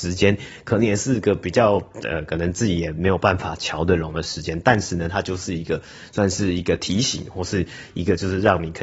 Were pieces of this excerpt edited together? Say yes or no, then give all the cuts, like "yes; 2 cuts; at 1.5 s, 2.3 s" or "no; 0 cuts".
no; 0 cuts